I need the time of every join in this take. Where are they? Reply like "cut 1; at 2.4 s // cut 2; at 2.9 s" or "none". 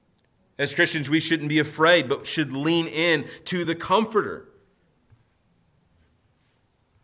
none

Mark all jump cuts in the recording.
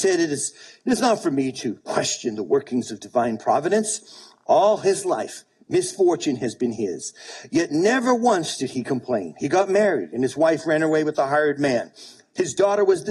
none

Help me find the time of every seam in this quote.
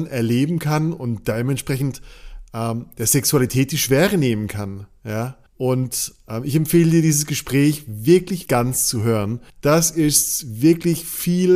cut 1; at 5.5 s // cut 2; at 8.5 s // cut 3; at 9.5 s

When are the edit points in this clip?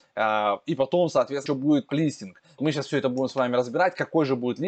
cut 1; at 1.5 s // cut 2; at 1.9 s // cut 3; at 2.6 s

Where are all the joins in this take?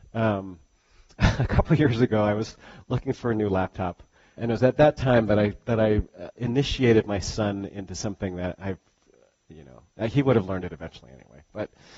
cut 1; at 4.4 s // cut 2; at 6.4 s

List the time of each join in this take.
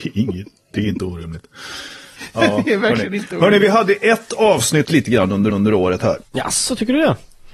cut 1; at 4.8 s // cut 2; at 5.5 s // cut 3; at 6.2 s

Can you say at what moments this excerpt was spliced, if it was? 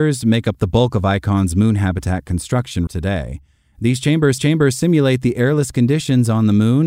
cut 1; at 2.9 s // cut 2; at 4.4 s

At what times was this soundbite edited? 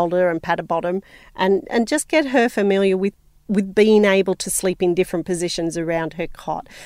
none

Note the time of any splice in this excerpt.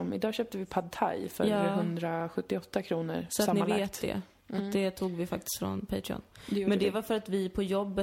none

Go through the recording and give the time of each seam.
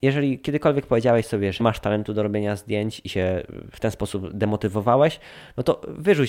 cut 1; at 1.6 s

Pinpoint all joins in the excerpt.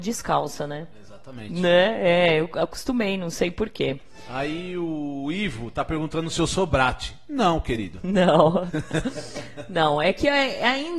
none

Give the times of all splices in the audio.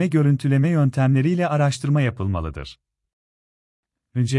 none

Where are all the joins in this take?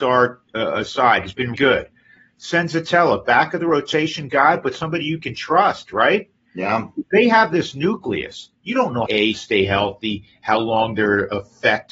cut 1; at 1.5 s // cut 2; at 9.1 s

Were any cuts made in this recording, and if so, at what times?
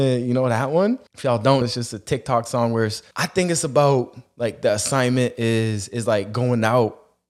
cut 1; at 1.1 s // cut 2; at 1.6 s // cut 3; at 3.1 s

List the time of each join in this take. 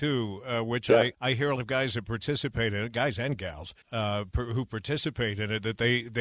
cut 1; at 1.1 s // cut 2; at 1.6 s // cut 3; at 3.8 s

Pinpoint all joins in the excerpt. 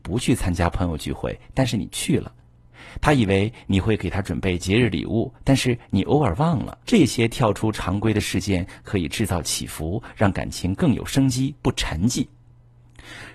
cut 1; at 6.8 s

